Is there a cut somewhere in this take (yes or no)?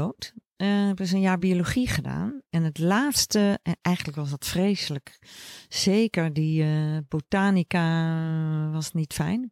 no